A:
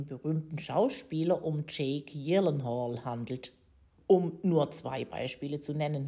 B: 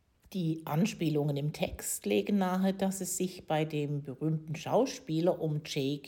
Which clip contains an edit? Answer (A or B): A